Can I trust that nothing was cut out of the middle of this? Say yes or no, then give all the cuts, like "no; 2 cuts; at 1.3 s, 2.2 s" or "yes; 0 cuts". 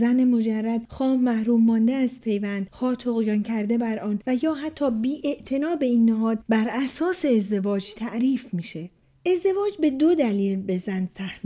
yes; 0 cuts